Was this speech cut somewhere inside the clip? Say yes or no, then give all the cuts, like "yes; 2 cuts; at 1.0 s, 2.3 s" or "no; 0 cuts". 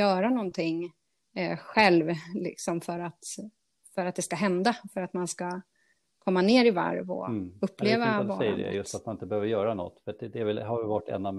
no; 0 cuts